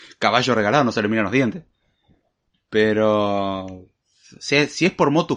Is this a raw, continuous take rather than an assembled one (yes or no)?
yes